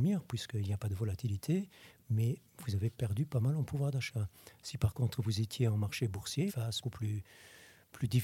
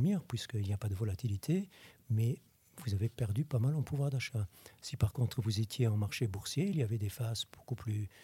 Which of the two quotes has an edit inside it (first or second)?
first